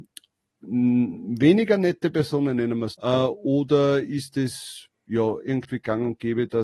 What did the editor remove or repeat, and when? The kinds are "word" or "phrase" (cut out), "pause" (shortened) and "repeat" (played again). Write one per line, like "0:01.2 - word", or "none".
0:02.9 - word